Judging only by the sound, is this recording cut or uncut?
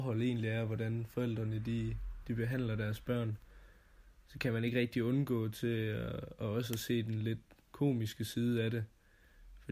uncut